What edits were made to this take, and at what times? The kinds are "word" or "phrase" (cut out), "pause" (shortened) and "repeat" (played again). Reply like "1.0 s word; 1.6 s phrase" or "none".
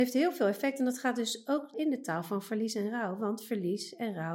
1.7 s word

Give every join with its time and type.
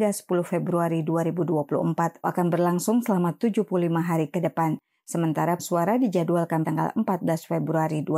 2.2 s word; 5.6 s word; 6.6 s word

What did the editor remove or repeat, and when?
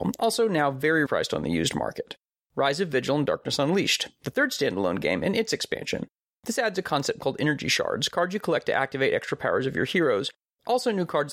1.1 s word

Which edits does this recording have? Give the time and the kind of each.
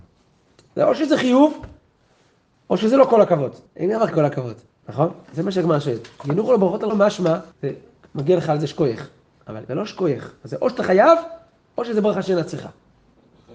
3.7 s pause; 4.1 s word; 4.7 s pause; 6.9 s word; 7.5 s pause; 9.7 s phrase

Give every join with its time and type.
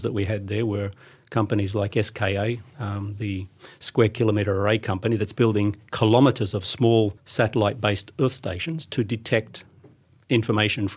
7.2 s pause

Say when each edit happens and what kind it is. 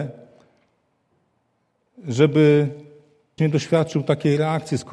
3.4 s word

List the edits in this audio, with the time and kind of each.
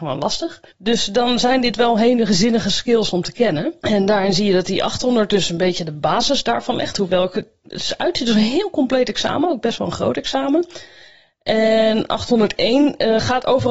none

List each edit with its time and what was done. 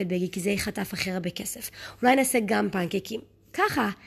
none

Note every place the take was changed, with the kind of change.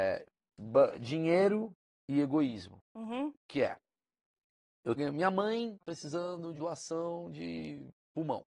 0.9 s word; 5.0 s word; 5.8 s word; 6.6 s word

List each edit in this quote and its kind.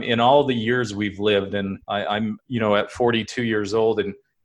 1.8 s pause; 2.4 s word

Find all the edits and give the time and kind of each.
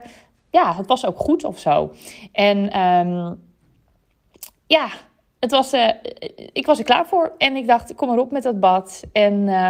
none

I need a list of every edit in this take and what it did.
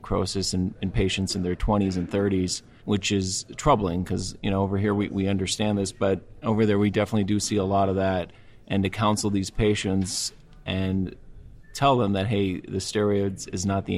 none

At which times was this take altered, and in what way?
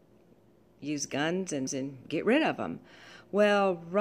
1.7 s word

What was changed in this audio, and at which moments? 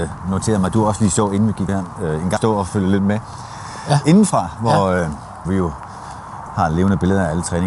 1.7 s word; 2.4 s word; 5.5 s word

